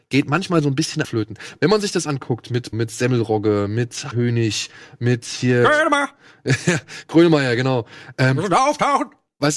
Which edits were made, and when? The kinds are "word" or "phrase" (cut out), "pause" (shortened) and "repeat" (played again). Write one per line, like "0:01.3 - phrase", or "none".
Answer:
0:01.0 - word
0:02.1 - word
0:02.7 - word
0:04.1 - word